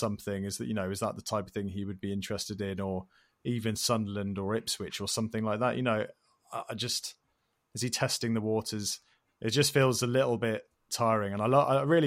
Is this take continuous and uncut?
yes; 0 cuts

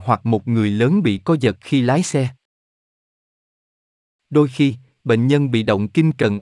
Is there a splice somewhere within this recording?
no; 0 cuts

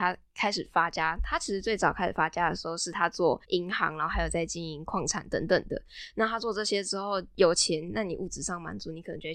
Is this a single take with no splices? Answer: no; 1 cut; at 3.4 s

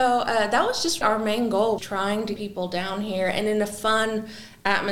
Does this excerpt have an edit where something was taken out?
yes; 3 cuts; at 1.0 s, 1.8 s, 2.4 s

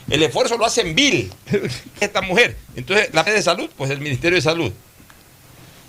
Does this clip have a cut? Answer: yes; 3 cuts; at 2.0 s, 2.6 s, 3.3 s

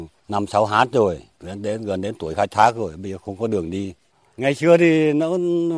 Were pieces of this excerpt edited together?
no; 0 cuts

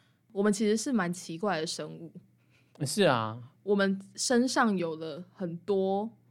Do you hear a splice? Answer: no; 0 cuts

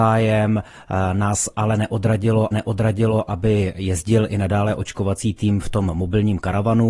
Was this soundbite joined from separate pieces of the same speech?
yes; 1 cut; at 2.5 s

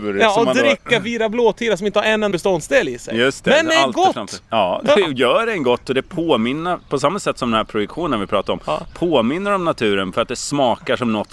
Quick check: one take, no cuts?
no; 2 cuts; at 2.3 s, 4.4 s

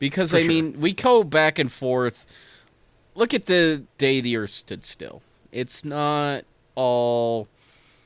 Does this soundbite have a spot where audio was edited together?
no; 0 cuts

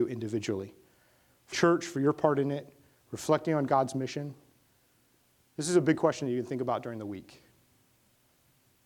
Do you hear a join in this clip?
yes; 1 cut; at 1.5 s

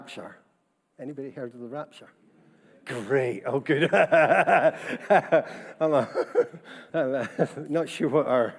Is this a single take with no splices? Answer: no; 1 cut; at 6.9 s

